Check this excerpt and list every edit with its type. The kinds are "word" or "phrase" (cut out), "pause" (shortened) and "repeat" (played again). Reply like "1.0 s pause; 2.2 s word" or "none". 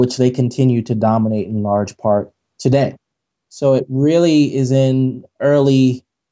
none